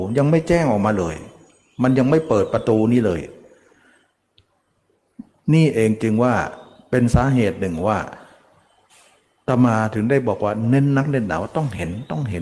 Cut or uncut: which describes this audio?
uncut